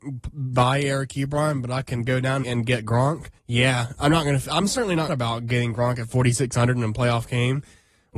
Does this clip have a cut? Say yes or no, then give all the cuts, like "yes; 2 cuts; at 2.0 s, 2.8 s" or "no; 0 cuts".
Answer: yes; 3 cuts; at 2.4 s, 3.4 s, 5.1 s